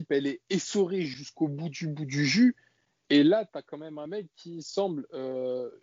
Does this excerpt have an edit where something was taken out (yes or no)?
no